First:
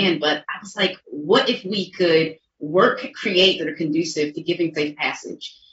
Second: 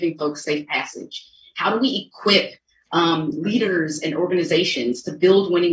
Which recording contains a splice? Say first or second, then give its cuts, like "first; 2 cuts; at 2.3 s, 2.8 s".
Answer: first; 3 cuts; at 3.1 s, 3.6 s, 4.7 s